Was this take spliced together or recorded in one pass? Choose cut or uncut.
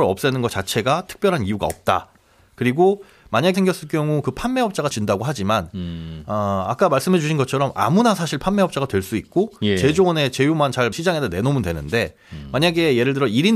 cut